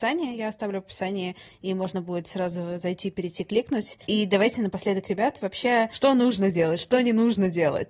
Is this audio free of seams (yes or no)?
yes